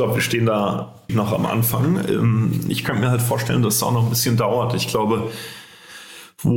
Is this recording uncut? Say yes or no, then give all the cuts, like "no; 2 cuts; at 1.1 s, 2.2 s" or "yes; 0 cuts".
no; 1 cut; at 1.1 s